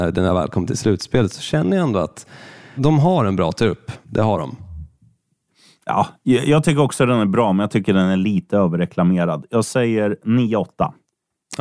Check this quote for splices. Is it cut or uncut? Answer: cut